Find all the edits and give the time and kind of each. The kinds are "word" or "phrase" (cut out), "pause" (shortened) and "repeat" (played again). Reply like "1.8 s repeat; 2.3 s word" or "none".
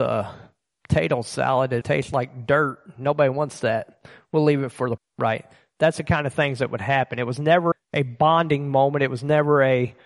1.8 s word; 5.0 s word; 7.7 s word

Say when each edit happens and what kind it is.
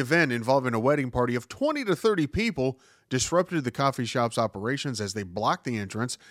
none

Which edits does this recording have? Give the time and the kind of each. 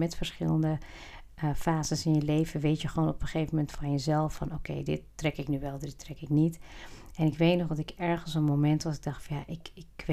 none

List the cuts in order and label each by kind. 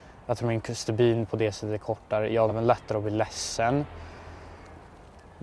2.5 s word

